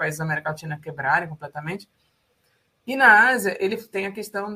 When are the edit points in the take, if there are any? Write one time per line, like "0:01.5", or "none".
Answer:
none

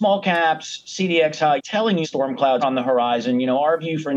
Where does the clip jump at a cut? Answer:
0:01.6
0:02.0
0:02.6

